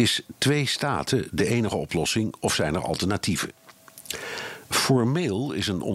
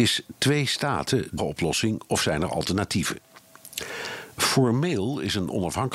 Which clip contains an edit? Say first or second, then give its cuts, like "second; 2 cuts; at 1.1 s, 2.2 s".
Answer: second; 1 cut; at 1.4 s